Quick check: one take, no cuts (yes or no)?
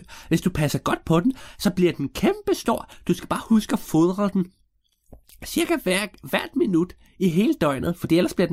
yes